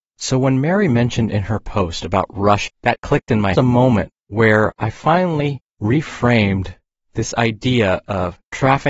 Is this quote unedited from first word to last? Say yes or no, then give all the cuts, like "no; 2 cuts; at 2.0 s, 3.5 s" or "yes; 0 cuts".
no; 2 cuts; at 2.7 s, 3.5 s